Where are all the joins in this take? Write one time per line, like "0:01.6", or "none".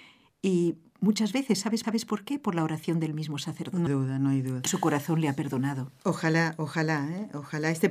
0:01.8
0:03.9
0:04.7